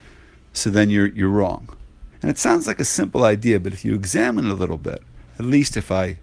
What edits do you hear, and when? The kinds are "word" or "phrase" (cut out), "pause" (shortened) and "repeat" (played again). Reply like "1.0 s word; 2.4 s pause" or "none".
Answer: 2.1 s pause